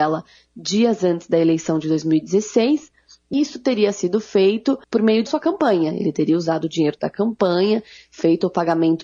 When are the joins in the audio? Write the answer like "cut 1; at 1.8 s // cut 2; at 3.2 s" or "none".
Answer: cut 1; at 3.3 s // cut 2; at 4.8 s // cut 3; at 5.3 s